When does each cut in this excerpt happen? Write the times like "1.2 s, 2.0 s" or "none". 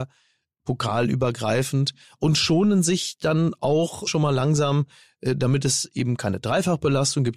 4.1 s